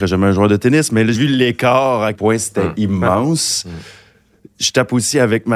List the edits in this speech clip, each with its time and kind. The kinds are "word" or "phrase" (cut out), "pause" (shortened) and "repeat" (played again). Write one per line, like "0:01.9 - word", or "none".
0:01.1 - word
0:02.1 - word